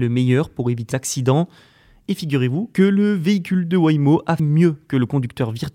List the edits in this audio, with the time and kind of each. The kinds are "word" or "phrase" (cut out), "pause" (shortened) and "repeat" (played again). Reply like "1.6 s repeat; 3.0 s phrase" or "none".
0.9 s word; 4.4 s word